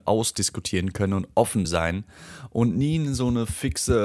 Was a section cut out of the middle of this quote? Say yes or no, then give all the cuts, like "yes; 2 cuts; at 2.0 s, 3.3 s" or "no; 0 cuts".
yes; 1 cut; at 1.6 s